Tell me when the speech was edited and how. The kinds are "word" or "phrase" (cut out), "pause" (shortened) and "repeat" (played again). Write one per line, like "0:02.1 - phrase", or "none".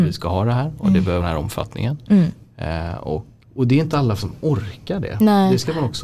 0:01.2 - word
0:03.4 - word
0:04.2 - word